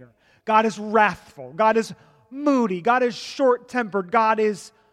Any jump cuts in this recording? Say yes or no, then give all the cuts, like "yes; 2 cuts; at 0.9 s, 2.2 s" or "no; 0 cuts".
no; 0 cuts